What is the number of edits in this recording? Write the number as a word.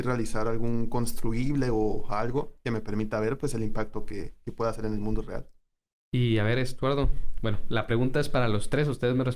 one